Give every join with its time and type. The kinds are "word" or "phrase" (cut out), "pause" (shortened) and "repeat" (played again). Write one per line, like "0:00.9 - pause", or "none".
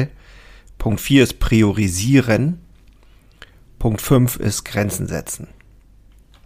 none